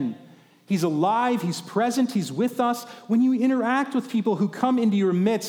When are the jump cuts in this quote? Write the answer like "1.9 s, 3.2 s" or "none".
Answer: none